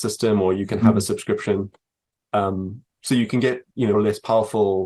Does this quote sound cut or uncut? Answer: cut